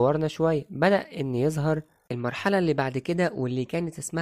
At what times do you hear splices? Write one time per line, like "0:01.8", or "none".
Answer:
none